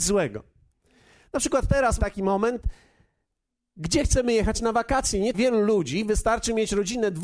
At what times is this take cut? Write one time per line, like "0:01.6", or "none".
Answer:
0:02.0
0:05.3